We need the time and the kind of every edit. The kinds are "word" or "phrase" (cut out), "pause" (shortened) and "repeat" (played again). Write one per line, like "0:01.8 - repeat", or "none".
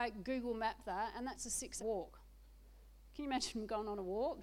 0:01.8 - word